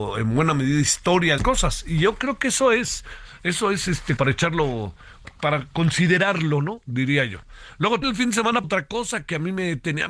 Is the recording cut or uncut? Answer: cut